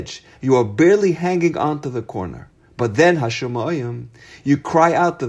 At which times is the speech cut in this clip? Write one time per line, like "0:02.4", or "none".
none